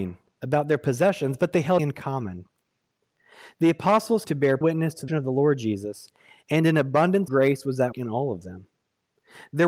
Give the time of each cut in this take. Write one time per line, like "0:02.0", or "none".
0:01.8
0:04.2
0:04.6
0:05.1
0:07.3
0:07.9